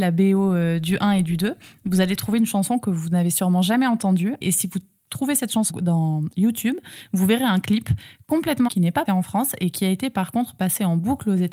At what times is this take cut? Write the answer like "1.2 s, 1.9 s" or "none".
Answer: 4.4 s, 5.7 s, 8.7 s, 9.1 s